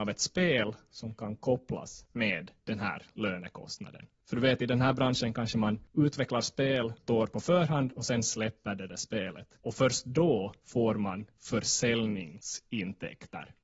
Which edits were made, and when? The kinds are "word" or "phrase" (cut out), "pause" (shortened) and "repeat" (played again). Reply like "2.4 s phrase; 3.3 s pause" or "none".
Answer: 7.1 s word